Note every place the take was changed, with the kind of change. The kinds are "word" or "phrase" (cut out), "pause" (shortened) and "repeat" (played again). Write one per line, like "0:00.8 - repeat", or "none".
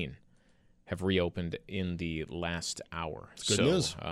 none